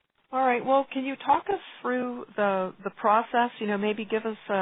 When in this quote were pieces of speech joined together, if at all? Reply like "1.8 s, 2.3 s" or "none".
1.8 s